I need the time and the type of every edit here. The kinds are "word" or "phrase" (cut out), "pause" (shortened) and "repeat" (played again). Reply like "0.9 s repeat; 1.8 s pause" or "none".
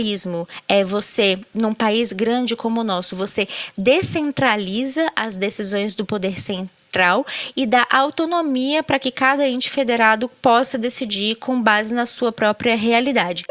none